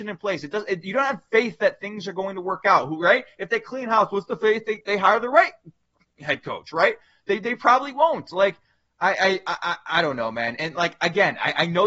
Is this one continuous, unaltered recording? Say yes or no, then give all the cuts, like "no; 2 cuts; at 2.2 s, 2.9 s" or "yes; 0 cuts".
yes; 0 cuts